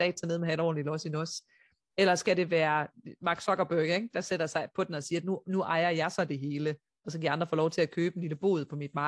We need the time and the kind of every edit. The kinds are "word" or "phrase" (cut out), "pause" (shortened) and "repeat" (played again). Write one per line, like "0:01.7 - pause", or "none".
none